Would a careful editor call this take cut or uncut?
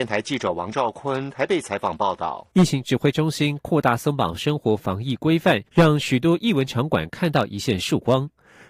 cut